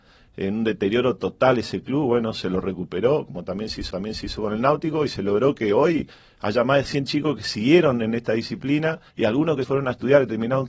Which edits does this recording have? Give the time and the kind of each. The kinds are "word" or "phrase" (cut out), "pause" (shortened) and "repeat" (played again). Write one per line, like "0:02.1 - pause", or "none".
0:03.9 - repeat
0:09.1 - pause
0:09.6 - word